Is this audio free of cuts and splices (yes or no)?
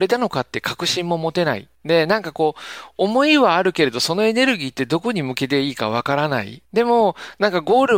no